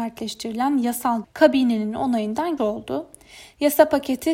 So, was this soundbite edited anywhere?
yes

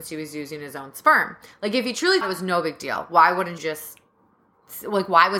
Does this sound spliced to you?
yes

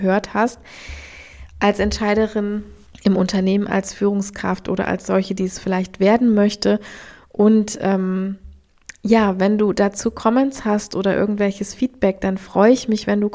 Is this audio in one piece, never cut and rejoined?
yes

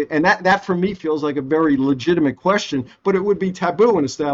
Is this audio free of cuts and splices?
yes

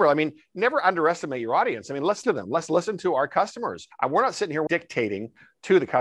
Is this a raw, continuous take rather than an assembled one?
no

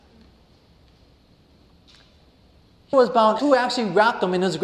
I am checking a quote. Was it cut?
yes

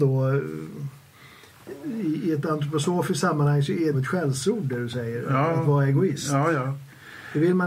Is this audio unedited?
no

